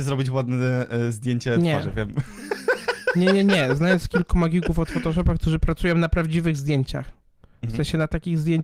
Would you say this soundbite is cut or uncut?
uncut